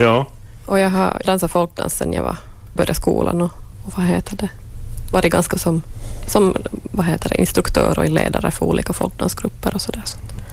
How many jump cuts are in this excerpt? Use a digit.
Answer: 3